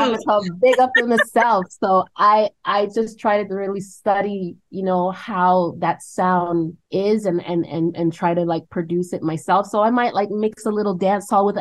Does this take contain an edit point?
yes; 1 cut; at 6.8 s

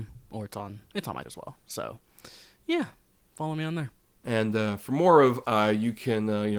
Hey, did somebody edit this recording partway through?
yes; 2 cuts; at 1.2 s, 5.4 s

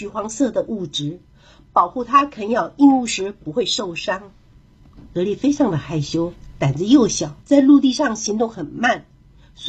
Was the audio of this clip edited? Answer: yes; 1 cut; at 7.4 s

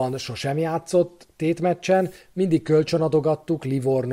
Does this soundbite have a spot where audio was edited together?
no; 0 cuts

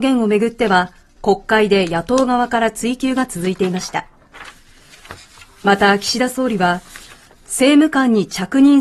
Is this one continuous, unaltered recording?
yes; 0 cuts

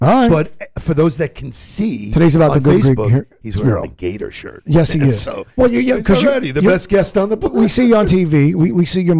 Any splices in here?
no; 0 cuts

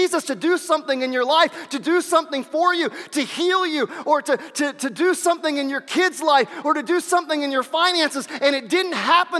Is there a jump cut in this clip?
no; 0 cuts

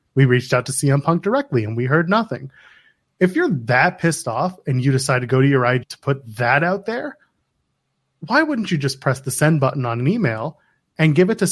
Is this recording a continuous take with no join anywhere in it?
no; 1 cut; at 5.8 s

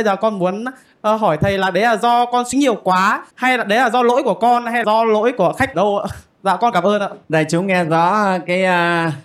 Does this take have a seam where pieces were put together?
yes; 5 cuts; at 2.5 s, 3.3 s, 4.8 s, 5.7 s, 7.2 s

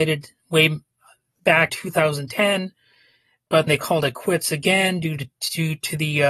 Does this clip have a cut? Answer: yes; 2 cuts; at 1.7 s, 3.7 s

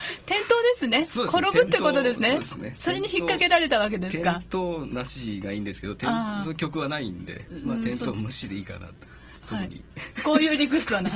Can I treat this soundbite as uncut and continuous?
yes; 0 cuts

